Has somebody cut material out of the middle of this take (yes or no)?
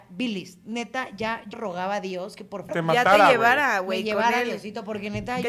yes